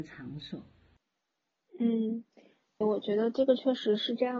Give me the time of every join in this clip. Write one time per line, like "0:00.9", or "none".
0:02.8

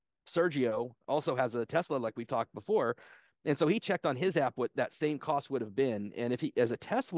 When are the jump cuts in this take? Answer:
none

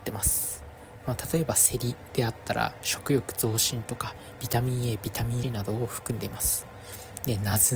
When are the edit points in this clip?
0:05.4

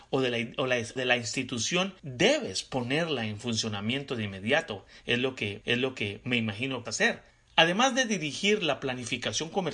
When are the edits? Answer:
0:01.0
0:02.0
0:05.6
0:06.9
0:07.3

